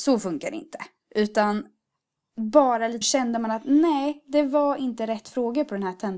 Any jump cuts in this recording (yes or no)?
yes